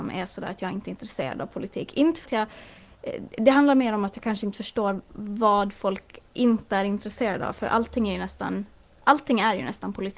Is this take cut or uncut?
cut